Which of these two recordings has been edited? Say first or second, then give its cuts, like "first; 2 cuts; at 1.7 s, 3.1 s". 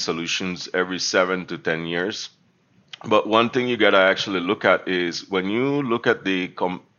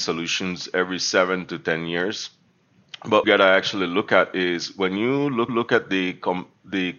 second; 2 cuts; at 3.2 s, 5.5 s